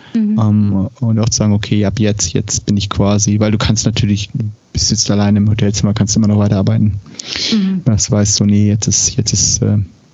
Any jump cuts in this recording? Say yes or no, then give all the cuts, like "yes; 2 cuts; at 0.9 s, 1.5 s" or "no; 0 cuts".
no; 0 cuts